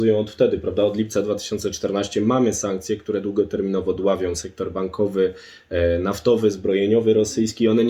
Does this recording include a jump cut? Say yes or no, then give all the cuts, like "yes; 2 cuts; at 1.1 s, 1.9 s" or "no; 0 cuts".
no; 0 cuts